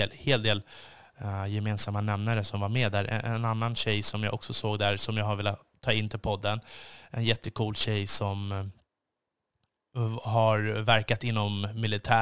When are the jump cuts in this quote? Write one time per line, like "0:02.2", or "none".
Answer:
none